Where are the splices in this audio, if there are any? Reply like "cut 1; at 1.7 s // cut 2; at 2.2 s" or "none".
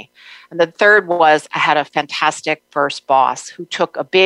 none